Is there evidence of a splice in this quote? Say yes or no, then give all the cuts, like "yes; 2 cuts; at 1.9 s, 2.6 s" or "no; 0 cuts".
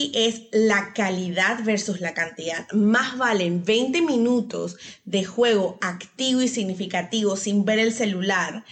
no; 0 cuts